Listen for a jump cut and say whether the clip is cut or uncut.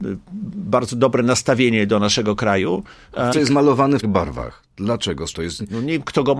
cut